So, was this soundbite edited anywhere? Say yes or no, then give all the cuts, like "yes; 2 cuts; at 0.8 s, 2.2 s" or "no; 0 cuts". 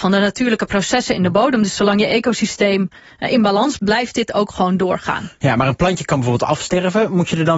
yes; 1 cut; at 3.8 s